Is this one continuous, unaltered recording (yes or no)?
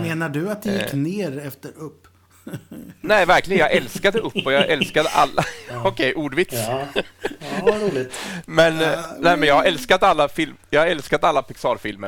yes